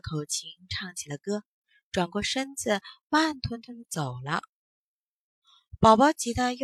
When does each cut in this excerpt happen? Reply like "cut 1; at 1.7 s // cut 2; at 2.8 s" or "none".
none